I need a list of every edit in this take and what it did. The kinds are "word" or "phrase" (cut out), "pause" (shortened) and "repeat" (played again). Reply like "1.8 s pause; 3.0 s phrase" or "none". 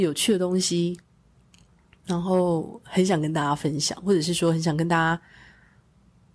none